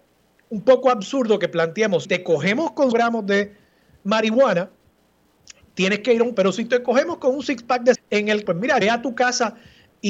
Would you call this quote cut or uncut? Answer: cut